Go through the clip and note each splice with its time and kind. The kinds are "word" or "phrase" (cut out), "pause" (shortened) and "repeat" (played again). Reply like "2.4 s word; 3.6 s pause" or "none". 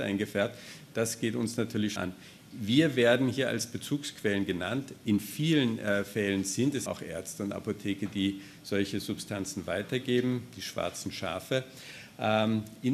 2.0 s word; 6.9 s word